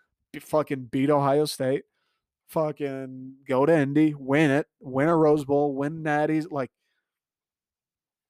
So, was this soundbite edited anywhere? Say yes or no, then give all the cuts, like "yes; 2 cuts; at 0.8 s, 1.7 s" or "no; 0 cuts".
no; 0 cuts